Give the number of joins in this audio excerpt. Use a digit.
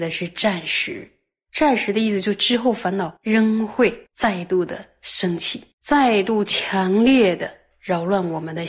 3